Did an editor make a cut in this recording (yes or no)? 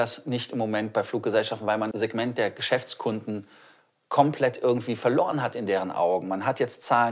yes